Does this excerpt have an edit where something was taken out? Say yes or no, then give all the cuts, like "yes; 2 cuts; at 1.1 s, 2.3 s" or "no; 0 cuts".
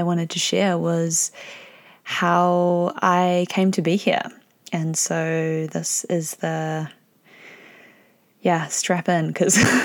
no; 0 cuts